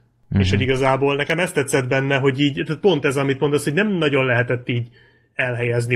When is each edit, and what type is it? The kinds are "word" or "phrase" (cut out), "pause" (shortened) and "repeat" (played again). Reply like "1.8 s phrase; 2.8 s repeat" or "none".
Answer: none